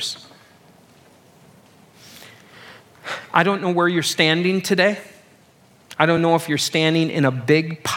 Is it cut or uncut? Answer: uncut